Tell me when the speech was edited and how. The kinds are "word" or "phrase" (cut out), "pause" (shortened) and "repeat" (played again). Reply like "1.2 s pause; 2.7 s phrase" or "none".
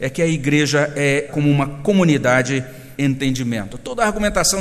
1.3 s word; 3.0 s word